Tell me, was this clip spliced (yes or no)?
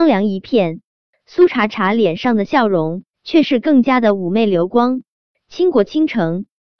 yes